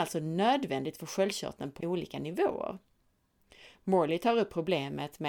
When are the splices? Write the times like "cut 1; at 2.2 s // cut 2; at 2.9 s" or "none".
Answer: cut 1; at 1.8 s